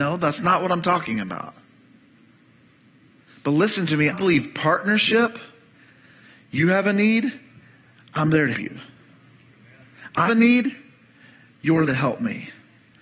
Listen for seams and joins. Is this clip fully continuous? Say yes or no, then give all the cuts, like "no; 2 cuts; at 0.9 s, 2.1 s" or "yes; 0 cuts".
no; 4 cuts; at 4.1 s, 8.5 s, 10.3 s, 11.9 s